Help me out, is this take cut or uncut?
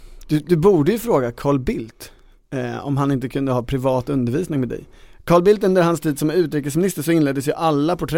uncut